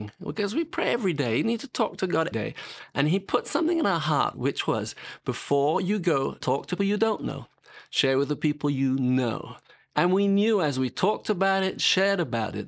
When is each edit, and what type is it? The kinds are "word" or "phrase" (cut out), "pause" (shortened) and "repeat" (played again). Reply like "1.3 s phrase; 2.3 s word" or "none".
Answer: 2.3 s word; 6.4 s word; 6.8 s word